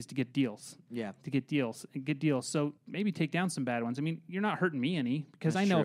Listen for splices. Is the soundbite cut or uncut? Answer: cut